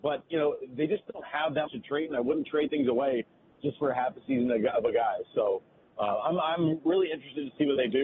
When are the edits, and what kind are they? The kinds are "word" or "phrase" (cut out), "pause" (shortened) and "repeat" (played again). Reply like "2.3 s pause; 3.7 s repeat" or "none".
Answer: 1.7 s word